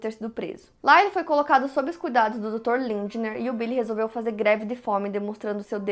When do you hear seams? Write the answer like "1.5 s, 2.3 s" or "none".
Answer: none